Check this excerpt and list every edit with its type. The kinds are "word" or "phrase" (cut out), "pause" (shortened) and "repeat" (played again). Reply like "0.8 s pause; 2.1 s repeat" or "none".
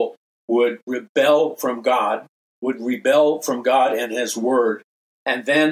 2.4 s pause